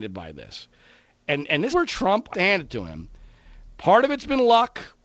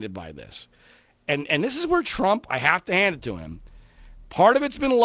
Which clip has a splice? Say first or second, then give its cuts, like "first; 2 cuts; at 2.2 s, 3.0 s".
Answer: first; 2 cuts; at 1.7 s, 2.3 s